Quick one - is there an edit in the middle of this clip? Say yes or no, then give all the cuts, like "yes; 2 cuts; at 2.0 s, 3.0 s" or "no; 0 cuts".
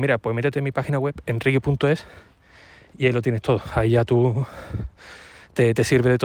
no; 0 cuts